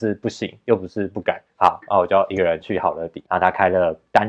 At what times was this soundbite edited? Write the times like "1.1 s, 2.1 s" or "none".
1.5 s, 3.2 s